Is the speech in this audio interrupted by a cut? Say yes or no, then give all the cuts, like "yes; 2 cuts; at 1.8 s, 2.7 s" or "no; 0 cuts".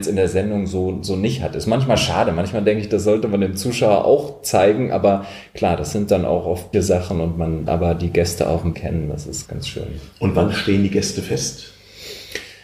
yes; 4 cuts; at 6.7 s, 7.7 s, 8.7 s, 9.4 s